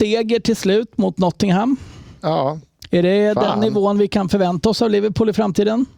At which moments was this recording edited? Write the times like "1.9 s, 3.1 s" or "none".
none